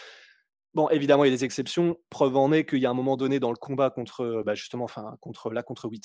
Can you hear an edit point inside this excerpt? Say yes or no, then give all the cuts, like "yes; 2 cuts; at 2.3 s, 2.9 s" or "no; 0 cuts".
no; 0 cuts